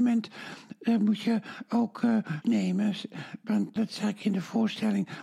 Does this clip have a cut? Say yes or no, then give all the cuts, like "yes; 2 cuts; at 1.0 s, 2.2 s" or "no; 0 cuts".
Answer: yes; 2 cuts; at 2.4 s, 3.8 s